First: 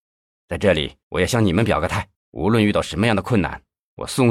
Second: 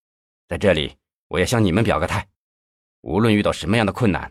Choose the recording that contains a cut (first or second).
first